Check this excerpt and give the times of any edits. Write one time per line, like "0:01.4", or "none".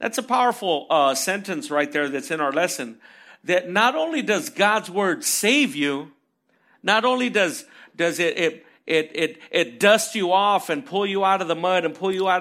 none